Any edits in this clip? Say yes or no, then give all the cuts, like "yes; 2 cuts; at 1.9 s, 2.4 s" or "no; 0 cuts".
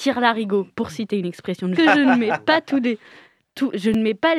yes; 1 cut; at 1.8 s